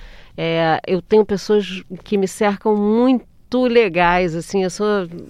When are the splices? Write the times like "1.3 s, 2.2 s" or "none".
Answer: none

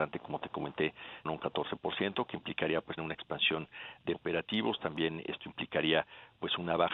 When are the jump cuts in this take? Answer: 1.3 s, 3.0 s, 4.1 s

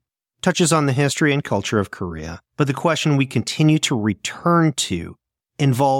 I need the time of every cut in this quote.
2.5 s

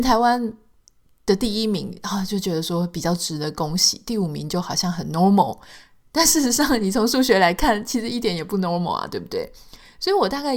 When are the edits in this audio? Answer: none

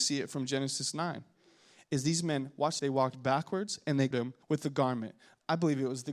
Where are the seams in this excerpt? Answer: 2.8 s, 4.1 s, 4.4 s

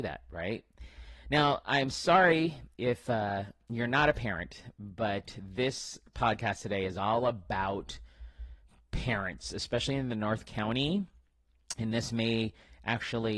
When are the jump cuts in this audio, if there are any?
none

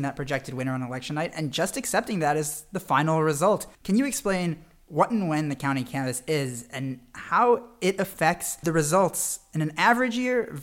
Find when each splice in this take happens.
3.7 s

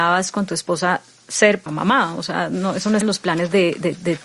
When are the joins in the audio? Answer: 1.7 s, 3.0 s

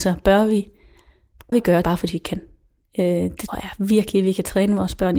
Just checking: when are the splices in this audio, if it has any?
1.5 s, 1.8 s, 3.5 s

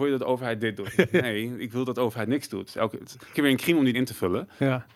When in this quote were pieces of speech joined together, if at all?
3.3 s, 3.9 s

